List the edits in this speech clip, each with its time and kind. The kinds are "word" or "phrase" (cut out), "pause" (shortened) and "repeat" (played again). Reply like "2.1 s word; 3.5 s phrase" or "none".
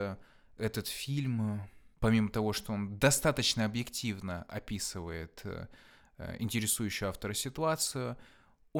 1.9 s pause